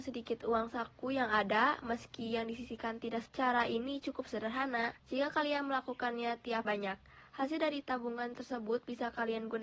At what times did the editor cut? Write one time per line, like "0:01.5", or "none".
0:03.3
0:05.0
0:06.6